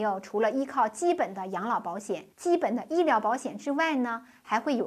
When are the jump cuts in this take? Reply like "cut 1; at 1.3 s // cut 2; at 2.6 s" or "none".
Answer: cut 1; at 2.3 s